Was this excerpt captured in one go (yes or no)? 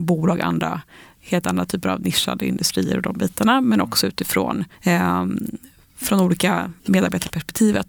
no